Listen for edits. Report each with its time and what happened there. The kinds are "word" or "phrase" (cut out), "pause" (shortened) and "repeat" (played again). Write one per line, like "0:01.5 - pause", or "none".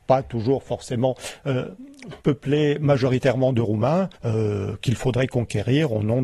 0:02.2 - pause
0:04.1 - pause